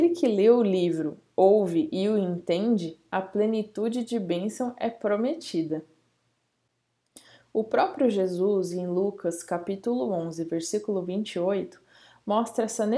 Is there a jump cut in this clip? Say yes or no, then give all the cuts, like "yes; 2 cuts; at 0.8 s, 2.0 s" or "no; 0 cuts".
no; 0 cuts